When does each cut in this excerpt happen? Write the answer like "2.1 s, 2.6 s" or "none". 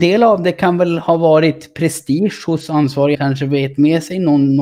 3.1 s

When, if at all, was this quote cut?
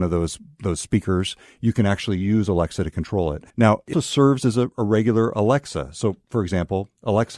3.5 s, 3.9 s

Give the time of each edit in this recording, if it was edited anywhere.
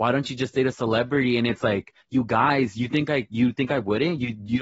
none

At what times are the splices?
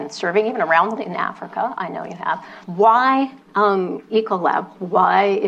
1.0 s, 2.6 s

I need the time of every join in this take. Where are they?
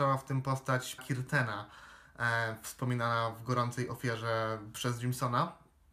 1.0 s

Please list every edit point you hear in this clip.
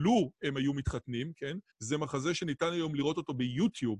1.7 s

